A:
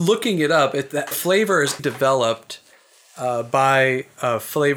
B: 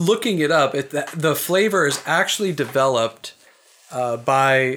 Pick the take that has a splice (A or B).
A